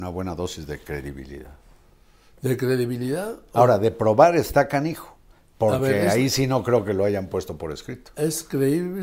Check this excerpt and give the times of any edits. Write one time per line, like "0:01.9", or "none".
none